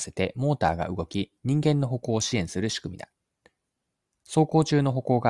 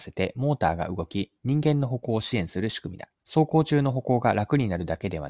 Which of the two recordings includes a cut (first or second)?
second